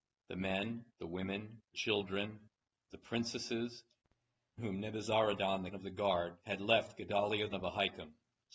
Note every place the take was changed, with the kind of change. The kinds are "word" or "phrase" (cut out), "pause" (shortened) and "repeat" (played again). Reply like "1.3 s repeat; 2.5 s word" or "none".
0.9 s pause; 1.7 s word; 4.6 s phrase; 5.7 s word; 6.4 s pause; 6.9 s word; 7.5 s word